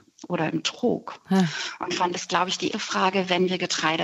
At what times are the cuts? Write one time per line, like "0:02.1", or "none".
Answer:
0:02.1
0:02.7